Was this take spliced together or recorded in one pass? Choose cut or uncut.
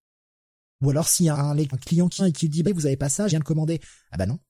cut